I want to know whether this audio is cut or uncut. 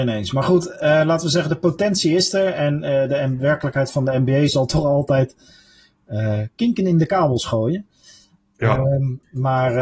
uncut